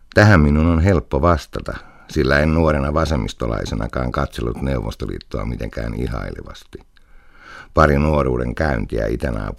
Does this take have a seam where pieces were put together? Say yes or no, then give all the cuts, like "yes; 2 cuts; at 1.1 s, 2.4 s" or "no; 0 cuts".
no; 0 cuts